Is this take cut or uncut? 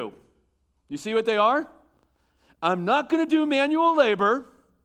uncut